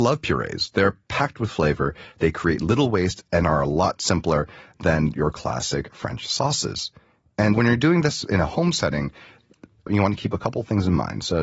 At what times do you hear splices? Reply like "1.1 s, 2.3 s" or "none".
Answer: 7.5 s